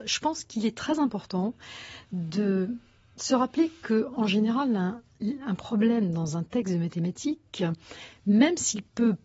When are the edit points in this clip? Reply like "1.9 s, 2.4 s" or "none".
none